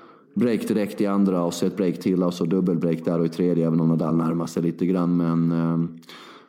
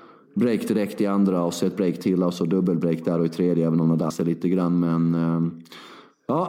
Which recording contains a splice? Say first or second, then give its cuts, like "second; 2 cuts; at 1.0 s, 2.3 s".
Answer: second; 1 cut; at 4.1 s